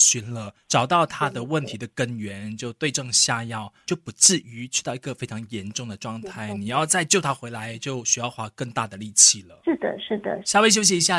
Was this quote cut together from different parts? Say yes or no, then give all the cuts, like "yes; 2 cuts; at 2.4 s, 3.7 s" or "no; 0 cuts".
no; 0 cuts